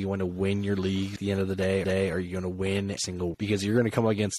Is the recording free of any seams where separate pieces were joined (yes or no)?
no